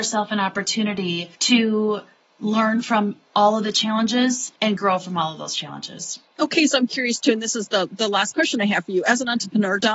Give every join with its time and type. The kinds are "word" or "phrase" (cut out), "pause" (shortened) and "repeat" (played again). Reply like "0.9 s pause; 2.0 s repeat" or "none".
1.3 s pause; 4.6 s pause